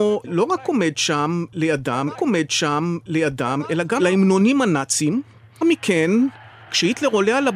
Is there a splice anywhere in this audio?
yes; 3 cuts; at 2.1 s, 4.0 s, 5.6 s

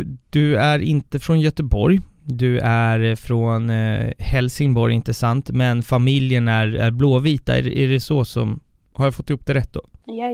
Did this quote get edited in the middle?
no; 0 cuts

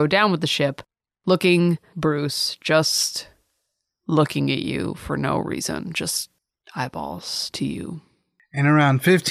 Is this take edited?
yes; 1 cut; at 1.9 s

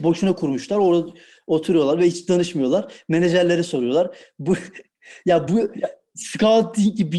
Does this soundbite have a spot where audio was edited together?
no; 0 cuts

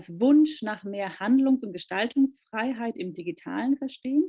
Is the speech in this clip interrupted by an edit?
no; 0 cuts

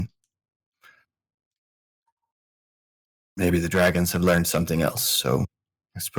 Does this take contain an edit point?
no; 0 cuts

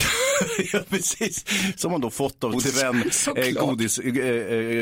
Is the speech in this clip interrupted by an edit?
yes; 1 cut; at 2.5 s

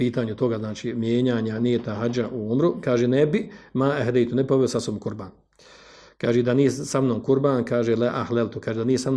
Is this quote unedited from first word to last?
yes; 0 cuts

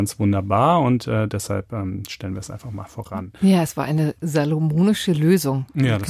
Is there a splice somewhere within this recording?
no; 0 cuts

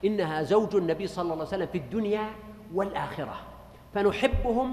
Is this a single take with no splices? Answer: yes; 0 cuts

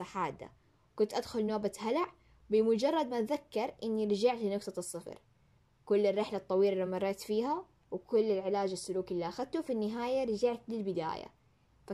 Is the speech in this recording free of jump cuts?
yes; 0 cuts

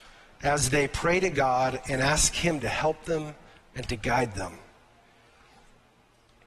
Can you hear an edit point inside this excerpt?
no; 0 cuts

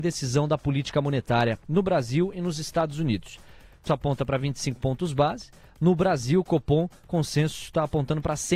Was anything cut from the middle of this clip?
yes; 1 cut; at 3.9 s

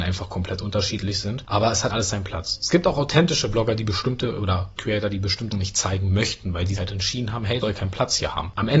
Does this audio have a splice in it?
yes; 5 cuts; at 1.9 s, 4.8 s, 5.5 s, 6.8 s, 7.6 s

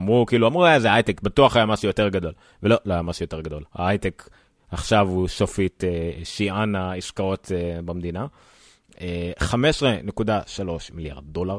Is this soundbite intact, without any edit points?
yes; 0 cuts

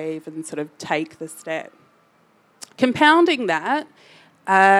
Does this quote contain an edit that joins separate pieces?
yes; 1 cut; at 2.7 s

